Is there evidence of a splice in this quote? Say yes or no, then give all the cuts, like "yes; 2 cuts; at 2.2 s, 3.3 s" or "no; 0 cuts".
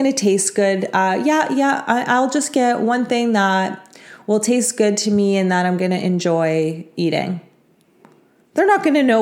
no; 0 cuts